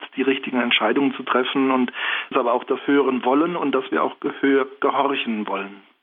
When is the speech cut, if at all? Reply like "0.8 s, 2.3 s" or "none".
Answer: 2.3 s, 2.8 s